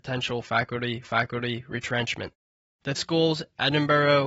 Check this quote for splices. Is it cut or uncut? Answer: cut